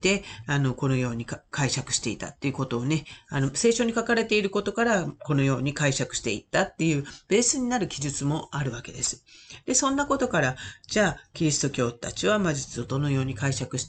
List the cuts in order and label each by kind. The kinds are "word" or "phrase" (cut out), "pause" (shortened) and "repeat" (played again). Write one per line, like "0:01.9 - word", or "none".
none